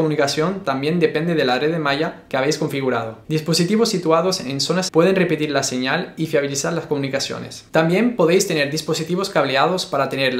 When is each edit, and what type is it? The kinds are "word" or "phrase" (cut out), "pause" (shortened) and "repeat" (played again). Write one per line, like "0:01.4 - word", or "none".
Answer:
0:04.9 - word

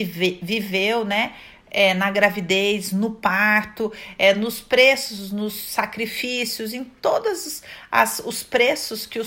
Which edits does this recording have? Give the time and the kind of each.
none

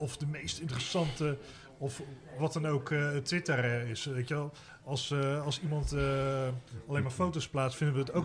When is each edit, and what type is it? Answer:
none

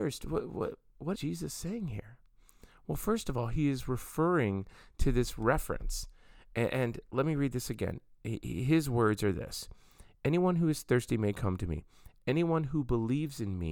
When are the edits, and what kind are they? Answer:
0:01.1 - word

